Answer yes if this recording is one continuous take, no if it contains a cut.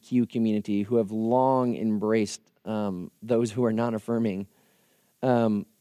yes